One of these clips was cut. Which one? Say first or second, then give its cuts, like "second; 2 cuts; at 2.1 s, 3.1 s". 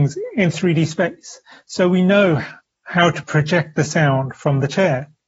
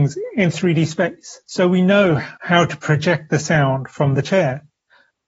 second; 2 cuts; at 1.4 s, 2.4 s